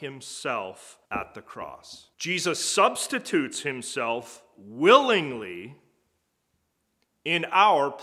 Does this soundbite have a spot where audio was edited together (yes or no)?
yes